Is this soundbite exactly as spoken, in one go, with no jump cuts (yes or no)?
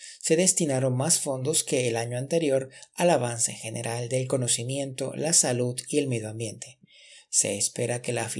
yes